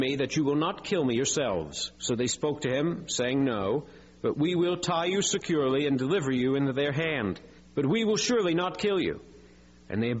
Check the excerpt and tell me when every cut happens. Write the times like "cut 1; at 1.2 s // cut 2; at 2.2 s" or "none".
cut 1; at 1.9 s // cut 2; at 7.6 s